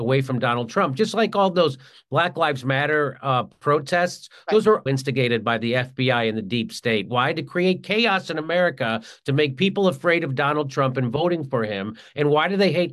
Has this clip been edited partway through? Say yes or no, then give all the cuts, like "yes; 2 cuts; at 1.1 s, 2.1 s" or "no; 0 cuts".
yes; 1 cut; at 4.9 s